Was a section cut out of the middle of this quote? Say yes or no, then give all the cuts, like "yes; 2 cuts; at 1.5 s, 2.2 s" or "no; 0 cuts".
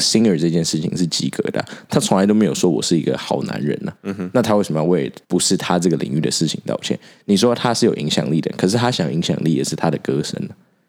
yes; 2 cuts; at 4.0 s, 5.2 s